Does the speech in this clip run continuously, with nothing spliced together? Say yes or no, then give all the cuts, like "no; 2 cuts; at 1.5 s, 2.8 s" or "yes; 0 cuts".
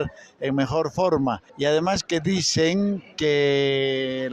no; 1 cut; at 1.5 s